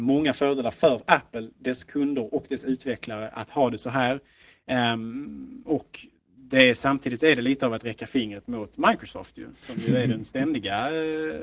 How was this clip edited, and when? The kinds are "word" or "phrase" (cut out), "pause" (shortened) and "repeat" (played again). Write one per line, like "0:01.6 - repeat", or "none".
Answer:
none